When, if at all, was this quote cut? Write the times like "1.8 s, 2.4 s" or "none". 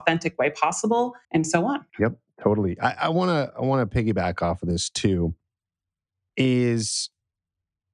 1.2 s, 1.9 s